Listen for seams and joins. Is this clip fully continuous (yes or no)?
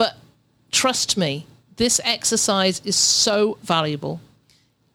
yes